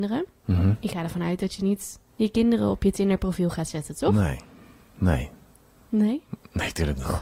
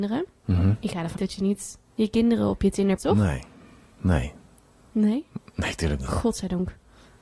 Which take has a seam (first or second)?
second